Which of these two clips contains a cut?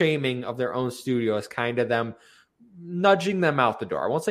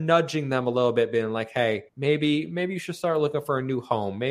second; 1 cut; at 1.9 s

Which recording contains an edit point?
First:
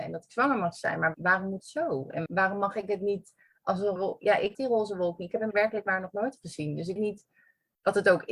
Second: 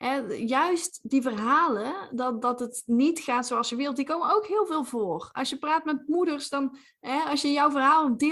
first; 7 cuts; at 1.1 s, 1.6 s, 2.3 s, 4.0 s, 4.5 s, 5.5 s, 7.0 s

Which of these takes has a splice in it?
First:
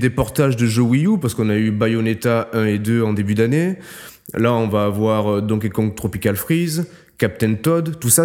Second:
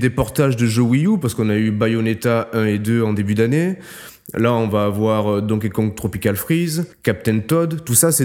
second; 1 cut; at 6.9 s

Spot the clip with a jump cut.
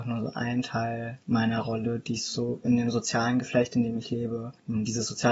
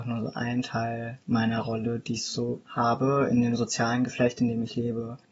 first; 1 cut; at 2.6 s

